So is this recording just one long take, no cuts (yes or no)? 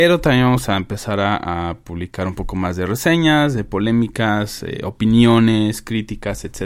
yes